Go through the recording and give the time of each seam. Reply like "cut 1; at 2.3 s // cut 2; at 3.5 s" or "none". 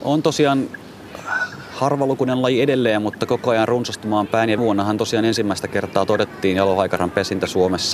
cut 1; at 4.6 s